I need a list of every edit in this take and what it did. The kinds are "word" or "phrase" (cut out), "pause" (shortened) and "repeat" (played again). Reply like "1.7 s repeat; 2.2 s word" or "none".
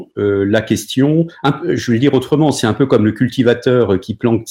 none